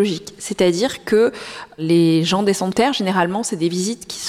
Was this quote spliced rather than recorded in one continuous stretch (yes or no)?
yes